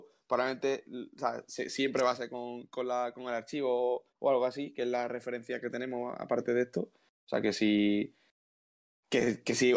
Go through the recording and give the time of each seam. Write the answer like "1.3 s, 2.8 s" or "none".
4.1 s